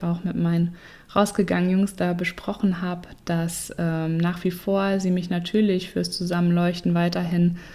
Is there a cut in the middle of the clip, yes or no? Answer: no